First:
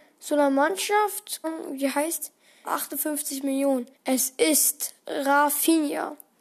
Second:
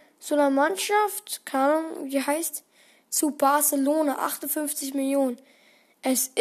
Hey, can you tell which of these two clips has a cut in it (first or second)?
first